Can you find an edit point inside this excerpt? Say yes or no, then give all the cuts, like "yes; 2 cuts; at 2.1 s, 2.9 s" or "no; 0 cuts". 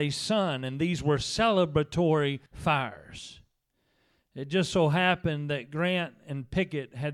yes; 1 cut; at 2.5 s